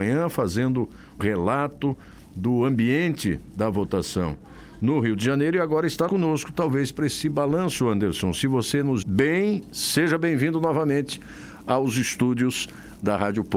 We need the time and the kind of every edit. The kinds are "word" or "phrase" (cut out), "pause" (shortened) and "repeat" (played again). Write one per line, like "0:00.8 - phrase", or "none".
0:01.2 - word
0:06.1 - word
0:09.0 - word